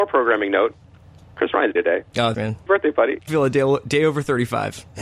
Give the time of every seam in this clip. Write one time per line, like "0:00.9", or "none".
0:01.8
0:02.3
0:02.7
0:03.3